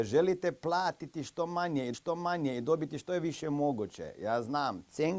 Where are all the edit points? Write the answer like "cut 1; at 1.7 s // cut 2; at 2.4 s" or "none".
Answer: cut 1; at 1.9 s